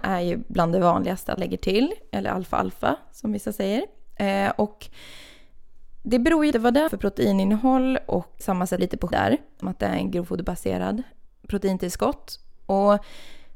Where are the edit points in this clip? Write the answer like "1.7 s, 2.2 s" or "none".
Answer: 1.4 s, 6.5 s, 6.9 s, 8.4 s, 8.8 s, 9.1 s, 9.6 s, 11.3 s